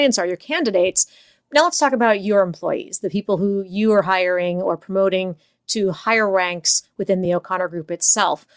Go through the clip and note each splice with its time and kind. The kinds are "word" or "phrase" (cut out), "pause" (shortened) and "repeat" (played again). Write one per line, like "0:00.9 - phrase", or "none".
none